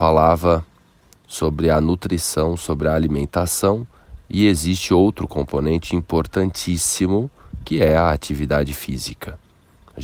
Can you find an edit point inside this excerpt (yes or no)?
no